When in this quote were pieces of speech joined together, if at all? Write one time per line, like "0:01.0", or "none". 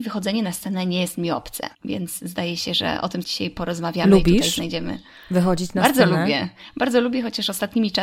0:01.7
0:03.2